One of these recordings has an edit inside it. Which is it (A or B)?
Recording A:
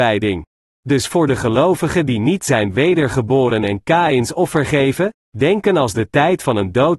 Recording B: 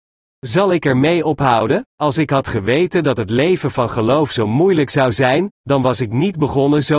B